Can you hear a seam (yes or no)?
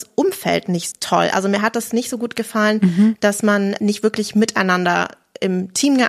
yes